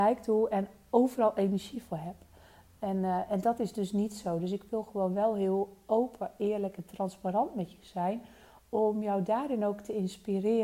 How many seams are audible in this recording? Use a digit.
0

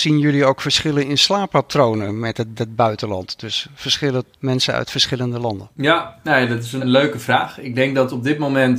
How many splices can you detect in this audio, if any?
4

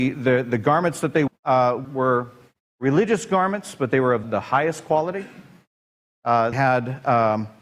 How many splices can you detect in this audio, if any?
4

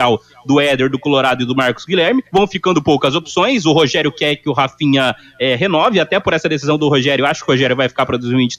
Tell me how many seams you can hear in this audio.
1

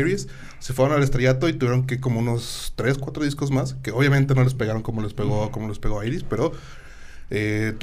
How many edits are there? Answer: 0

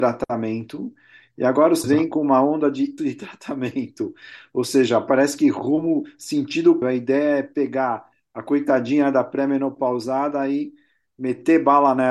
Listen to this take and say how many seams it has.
3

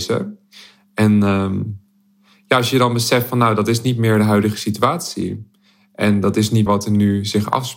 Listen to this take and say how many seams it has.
1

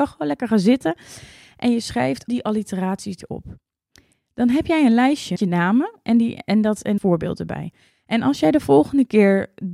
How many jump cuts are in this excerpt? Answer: 4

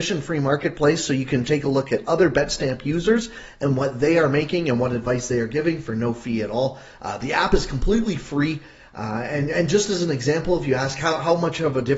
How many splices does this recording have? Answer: 0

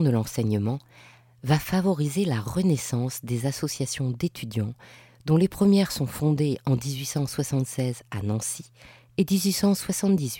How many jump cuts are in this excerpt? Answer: 0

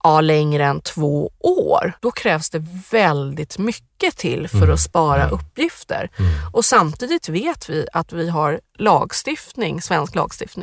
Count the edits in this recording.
1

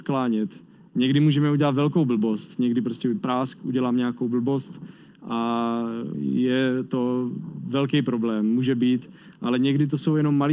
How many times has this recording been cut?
1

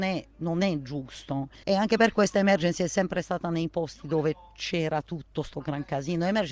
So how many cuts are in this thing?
1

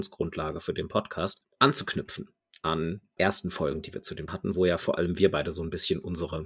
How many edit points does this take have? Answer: 3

